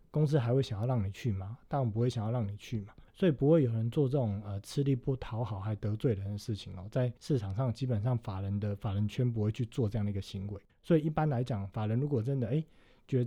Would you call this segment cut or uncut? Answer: cut